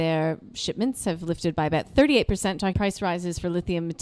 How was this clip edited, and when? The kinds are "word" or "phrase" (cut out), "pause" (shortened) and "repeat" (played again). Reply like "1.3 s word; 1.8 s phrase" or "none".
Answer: 2.7 s word